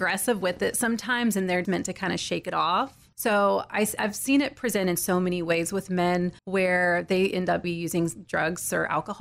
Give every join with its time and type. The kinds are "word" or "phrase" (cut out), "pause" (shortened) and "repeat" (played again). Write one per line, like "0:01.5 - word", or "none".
0:01.6 - word
0:06.4 - pause
0:07.6 - word

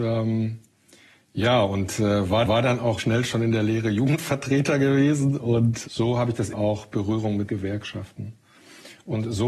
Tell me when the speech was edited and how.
0:02.4 - repeat
0:03.0 - word
0:05.9 - word
0:06.5 - phrase
0:07.5 - phrase

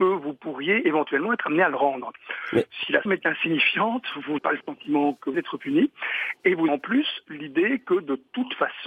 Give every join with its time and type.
0:03.1 - word
0:04.4 - word
0:05.3 - word
0:06.7 - word

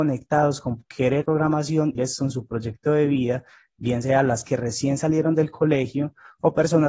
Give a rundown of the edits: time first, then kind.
0:01.2 - word
0:01.9 - word
0:04.4 - word

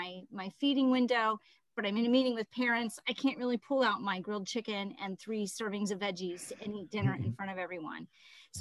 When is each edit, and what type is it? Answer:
none

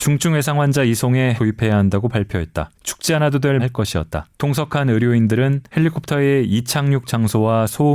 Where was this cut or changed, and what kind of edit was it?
0:01.4 - word
0:02.7 - pause
0:03.6 - phrase
0:04.3 - pause
0:05.7 - pause

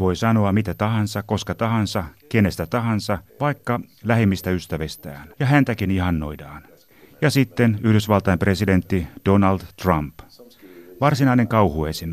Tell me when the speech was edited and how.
0:03.3 - pause
0:05.3 - pause
0:06.9 - pause

